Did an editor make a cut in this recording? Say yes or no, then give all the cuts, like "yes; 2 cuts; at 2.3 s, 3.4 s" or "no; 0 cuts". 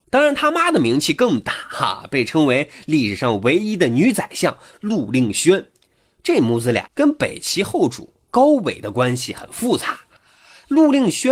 yes; 1 cut; at 6.9 s